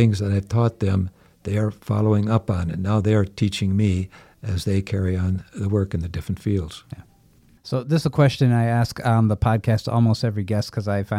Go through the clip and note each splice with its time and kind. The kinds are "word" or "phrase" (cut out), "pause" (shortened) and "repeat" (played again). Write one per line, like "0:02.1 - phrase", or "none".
none

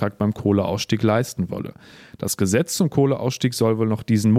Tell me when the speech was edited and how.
none

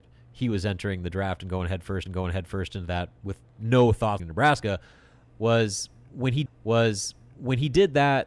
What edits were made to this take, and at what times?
0:02.1 - repeat
0:04.2 - phrase
0:06.5 - repeat

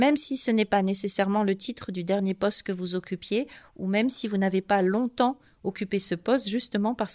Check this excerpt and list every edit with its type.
none

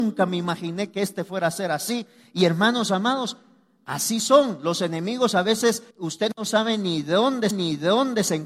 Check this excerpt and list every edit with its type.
0:05.9 - pause
0:07.5 - repeat

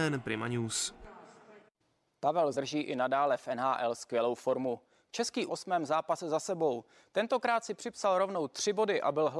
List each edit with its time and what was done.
0:02.5 - word
0:05.5 - phrase

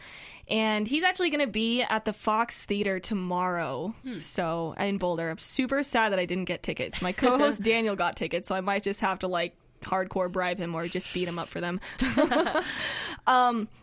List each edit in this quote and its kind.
none

